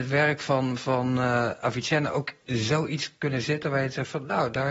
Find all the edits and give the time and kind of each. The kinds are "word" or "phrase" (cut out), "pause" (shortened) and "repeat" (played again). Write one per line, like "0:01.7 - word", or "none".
none